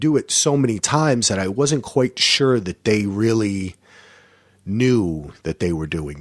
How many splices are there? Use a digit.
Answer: 0